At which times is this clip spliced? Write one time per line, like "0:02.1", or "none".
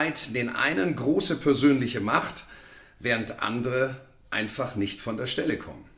none